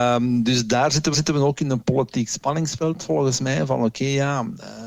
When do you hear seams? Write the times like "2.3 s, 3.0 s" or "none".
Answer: 1.1 s